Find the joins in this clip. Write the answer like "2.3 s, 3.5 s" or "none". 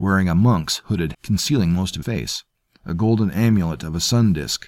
1.1 s, 2.0 s, 2.5 s